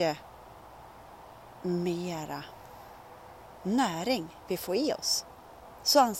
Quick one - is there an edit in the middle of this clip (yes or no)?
no